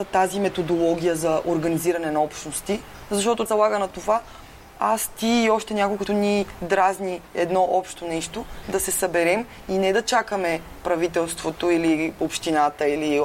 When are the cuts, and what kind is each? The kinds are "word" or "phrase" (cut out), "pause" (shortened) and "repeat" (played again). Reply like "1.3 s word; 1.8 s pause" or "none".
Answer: 3.5 s word; 6.1 s phrase